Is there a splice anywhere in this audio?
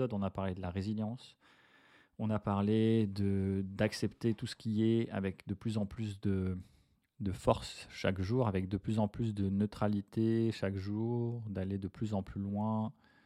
no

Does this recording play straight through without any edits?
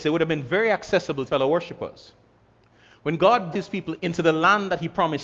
no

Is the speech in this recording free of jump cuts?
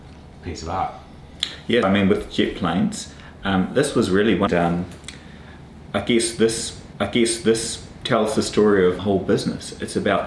no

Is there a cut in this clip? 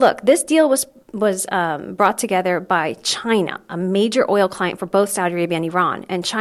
no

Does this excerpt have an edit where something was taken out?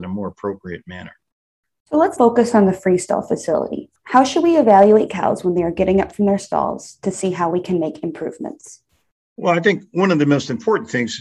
yes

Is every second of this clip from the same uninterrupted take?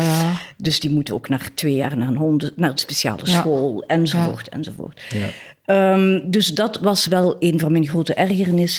yes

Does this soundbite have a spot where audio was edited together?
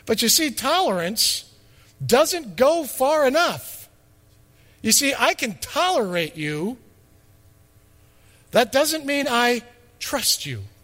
no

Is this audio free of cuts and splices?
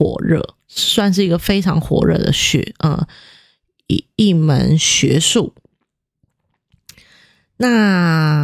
yes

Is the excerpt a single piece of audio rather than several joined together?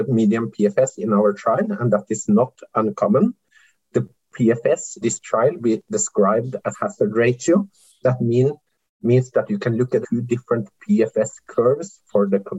no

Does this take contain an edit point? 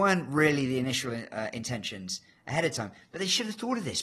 no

